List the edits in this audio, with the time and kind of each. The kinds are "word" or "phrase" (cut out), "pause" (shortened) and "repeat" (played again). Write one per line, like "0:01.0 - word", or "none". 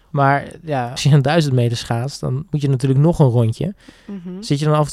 0:01.0 - word